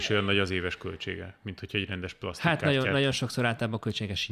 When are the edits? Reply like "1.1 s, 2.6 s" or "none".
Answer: none

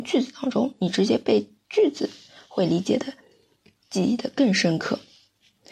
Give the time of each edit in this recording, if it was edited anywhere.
none

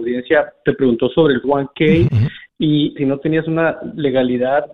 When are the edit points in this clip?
1.4 s, 2.1 s, 3.0 s

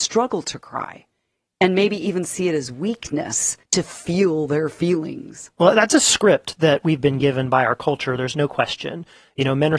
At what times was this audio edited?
3.6 s

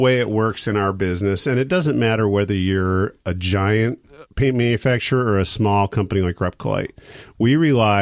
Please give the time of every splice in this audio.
4.3 s

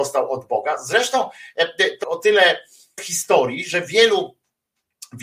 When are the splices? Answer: 2.0 s, 3.0 s

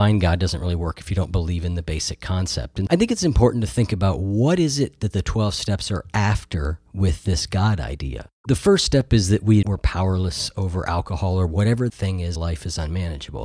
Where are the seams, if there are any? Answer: 2.9 s, 6.9 s, 8.3 s, 9.6 s, 11.9 s, 12.4 s

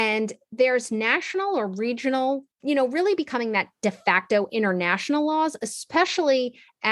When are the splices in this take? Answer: 2.5 s

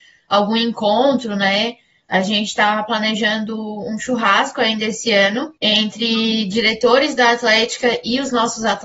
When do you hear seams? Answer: 5.6 s

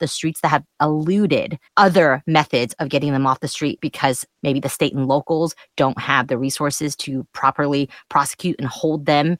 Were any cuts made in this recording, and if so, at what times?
1.7 s, 3.8 s, 4.3 s

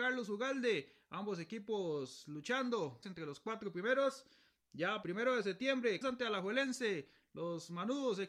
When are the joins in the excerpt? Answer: 3.0 s, 5.0 s, 6.0 s

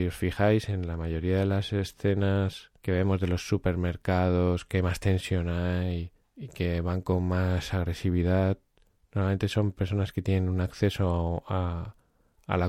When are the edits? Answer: 2.8 s, 6.2 s, 8.9 s

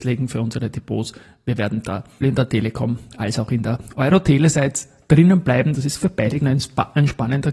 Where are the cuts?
2.2 s, 6.4 s

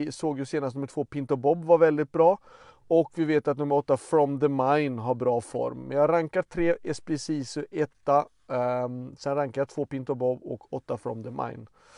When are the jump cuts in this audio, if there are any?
none

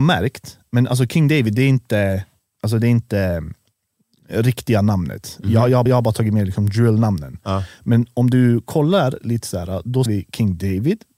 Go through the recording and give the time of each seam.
5.9 s, 10.1 s

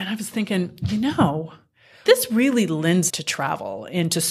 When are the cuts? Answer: 2.1 s, 3.1 s

